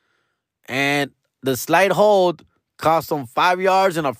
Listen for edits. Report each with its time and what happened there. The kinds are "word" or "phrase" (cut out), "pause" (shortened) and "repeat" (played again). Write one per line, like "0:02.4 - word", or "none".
none